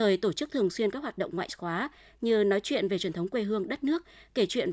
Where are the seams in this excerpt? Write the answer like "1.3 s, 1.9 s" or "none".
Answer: none